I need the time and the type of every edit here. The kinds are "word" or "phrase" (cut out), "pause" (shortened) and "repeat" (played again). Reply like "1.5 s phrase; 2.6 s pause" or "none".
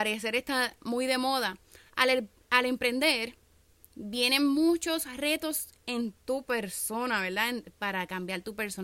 none